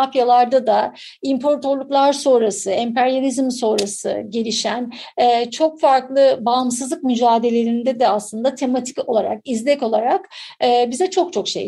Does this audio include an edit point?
no; 0 cuts

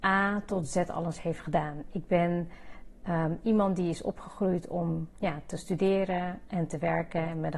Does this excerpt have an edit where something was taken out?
no; 0 cuts

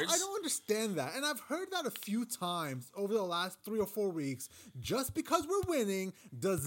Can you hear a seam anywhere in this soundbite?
no; 0 cuts

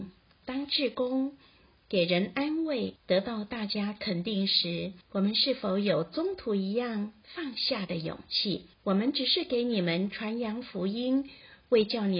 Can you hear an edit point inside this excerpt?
yes; 3 cuts; at 3.0 s, 5.0 s, 8.7 s

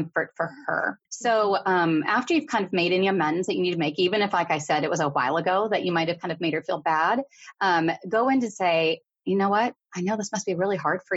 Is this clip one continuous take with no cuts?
no; 1 cut; at 1.1 s

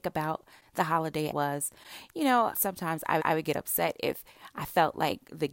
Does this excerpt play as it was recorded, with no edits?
no; 3 cuts; at 1.3 s, 2.5 s, 3.2 s

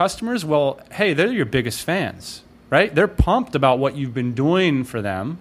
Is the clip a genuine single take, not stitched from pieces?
yes; 0 cuts

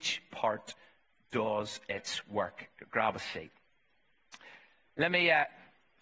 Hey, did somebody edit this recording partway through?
no; 0 cuts

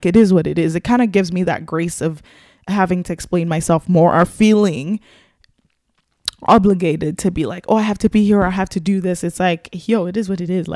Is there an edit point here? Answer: no; 0 cuts

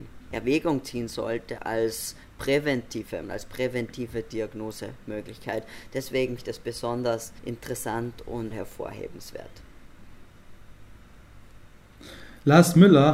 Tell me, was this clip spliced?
yes; 5 cuts; at 1.6 s, 3.2 s, 6.4 s, 7.4 s, 8.5 s

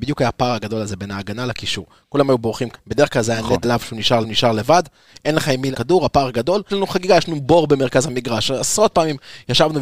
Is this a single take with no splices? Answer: no; 5 cuts; at 2.7 s, 3.6 s, 4.2 s, 5.7 s, 6.7 s

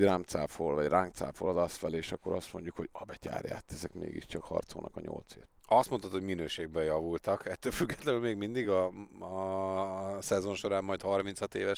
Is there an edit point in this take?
no; 0 cuts

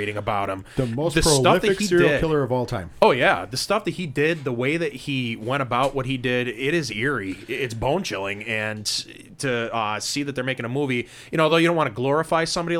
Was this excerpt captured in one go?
yes; 0 cuts

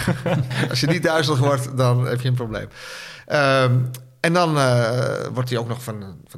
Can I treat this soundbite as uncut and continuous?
yes; 0 cuts

